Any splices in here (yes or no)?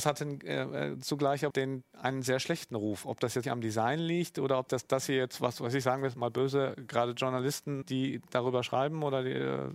yes